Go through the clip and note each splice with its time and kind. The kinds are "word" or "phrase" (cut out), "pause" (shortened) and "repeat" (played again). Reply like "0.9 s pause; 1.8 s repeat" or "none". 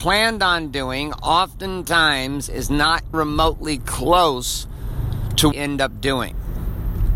3.1 s word; 5.5 s phrase